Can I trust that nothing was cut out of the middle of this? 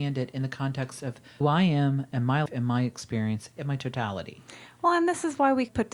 no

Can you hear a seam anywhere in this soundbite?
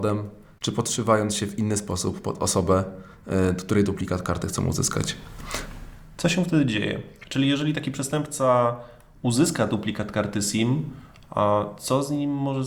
no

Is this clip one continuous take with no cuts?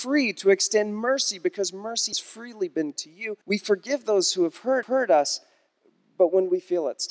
no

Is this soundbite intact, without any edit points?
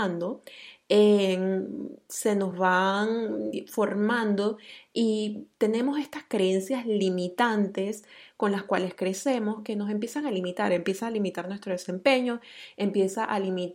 yes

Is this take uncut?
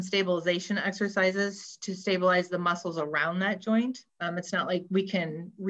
no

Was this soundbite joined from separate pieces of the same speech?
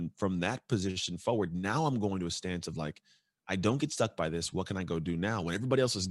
no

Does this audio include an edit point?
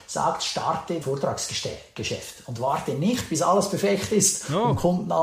yes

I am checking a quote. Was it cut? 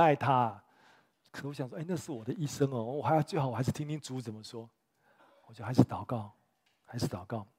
no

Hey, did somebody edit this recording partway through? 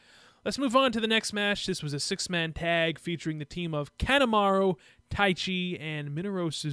no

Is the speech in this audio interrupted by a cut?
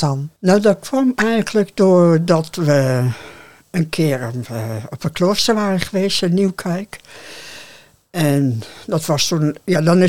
no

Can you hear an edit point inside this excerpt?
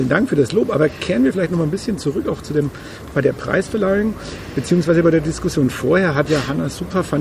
no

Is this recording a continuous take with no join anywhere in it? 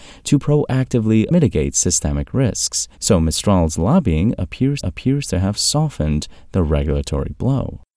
no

